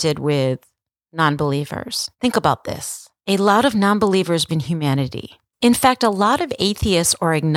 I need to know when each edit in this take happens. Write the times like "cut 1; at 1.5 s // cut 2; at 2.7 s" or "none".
cut 1; at 2.1 s // cut 2; at 3.2 s // cut 3; at 4.5 s // cut 4; at 5.5 s